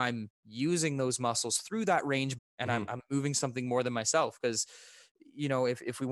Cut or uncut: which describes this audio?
cut